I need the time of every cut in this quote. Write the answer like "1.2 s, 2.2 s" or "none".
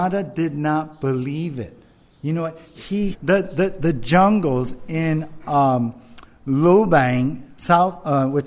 3.1 s